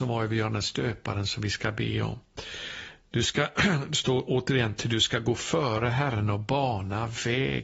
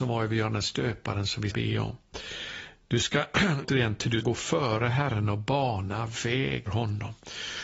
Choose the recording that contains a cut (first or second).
second